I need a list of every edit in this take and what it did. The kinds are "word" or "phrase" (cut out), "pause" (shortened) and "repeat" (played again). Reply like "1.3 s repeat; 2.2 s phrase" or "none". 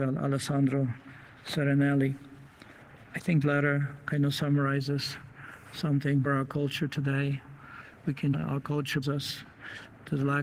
3.4 s word; 6.3 s word; 8.3 s phrase; 9.0 s word